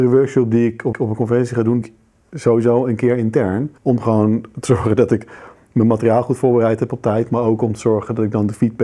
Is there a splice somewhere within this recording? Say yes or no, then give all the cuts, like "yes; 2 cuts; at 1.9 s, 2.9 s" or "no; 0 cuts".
yes; 3 cuts; at 0.9 s, 1.8 s, 3.8 s